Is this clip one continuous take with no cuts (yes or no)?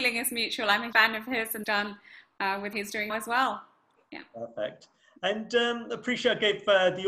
no